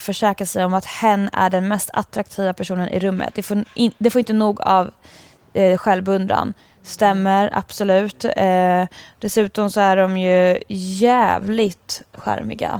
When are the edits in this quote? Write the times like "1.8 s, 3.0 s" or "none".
none